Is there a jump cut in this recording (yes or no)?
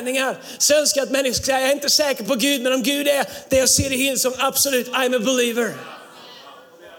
no